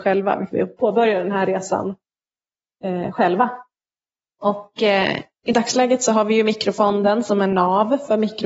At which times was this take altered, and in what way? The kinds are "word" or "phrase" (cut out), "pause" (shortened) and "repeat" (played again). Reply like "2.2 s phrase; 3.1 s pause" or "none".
none